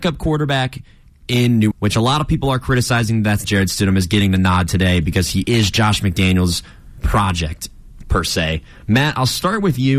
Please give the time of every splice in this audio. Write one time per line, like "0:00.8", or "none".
0:01.7
0:03.4